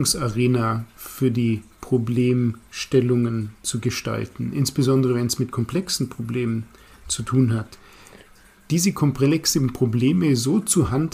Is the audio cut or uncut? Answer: uncut